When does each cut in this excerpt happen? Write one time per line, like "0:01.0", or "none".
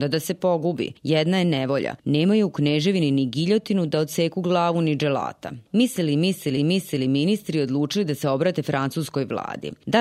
0:05.7
0:06.6